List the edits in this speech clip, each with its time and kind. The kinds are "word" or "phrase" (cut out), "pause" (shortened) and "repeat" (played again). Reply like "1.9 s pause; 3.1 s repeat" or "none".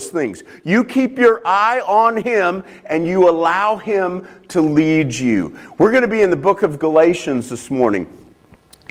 none